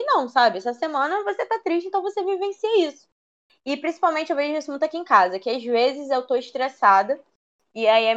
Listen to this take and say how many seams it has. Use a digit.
0